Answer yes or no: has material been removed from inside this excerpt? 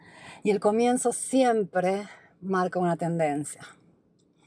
no